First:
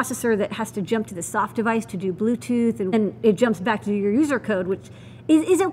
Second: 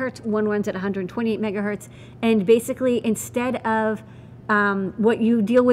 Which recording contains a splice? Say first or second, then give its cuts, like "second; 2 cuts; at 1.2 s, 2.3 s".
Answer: first; 1 cut; at 2.9 s